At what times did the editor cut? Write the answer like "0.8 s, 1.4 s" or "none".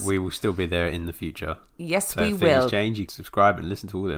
3.1 s